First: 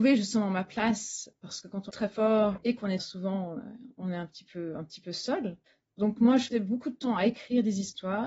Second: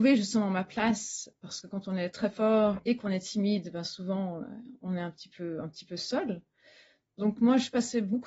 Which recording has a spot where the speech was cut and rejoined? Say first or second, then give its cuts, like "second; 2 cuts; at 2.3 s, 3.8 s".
first; 4 cuts; at 1.9 s, 3.0 s, 5.7 s, 6.5 s